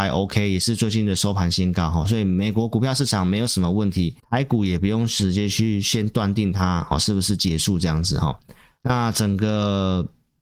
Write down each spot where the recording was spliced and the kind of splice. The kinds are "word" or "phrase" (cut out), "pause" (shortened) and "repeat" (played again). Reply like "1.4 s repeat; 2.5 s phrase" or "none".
4.2 s pause